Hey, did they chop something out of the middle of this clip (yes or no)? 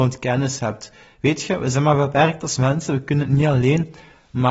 no